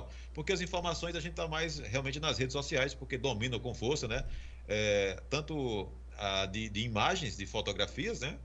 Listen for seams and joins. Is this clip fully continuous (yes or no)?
yes